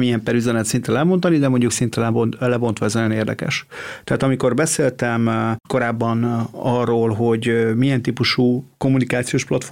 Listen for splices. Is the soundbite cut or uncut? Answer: cut